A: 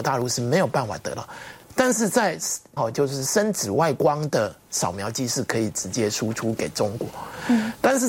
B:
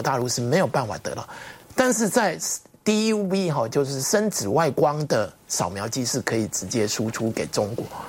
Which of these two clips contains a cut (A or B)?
A